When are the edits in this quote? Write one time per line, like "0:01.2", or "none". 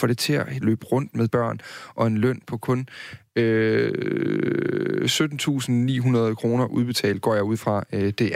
0:01.3

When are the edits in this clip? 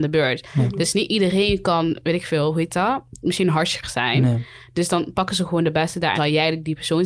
0:03.8
0:06.2

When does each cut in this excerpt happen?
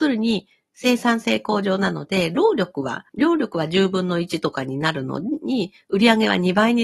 0:03.1

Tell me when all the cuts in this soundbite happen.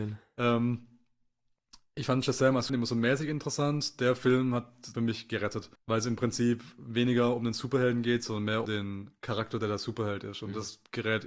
0:02.7
0:04.9
0:05.8
0:08.7

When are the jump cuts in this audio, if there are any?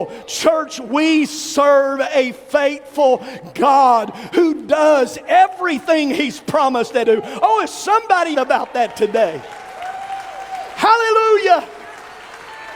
0:07.0
0:08.3

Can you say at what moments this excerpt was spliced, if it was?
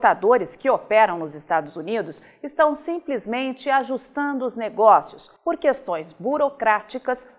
0:05.4

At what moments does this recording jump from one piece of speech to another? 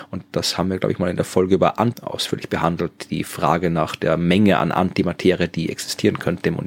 0:01.9

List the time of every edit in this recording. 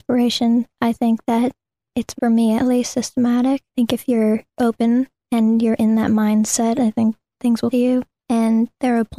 0:02.2
0:03.7
0:07.7

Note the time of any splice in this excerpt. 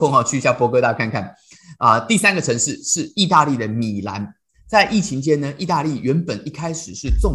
none

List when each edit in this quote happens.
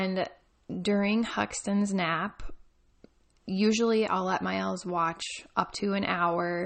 none

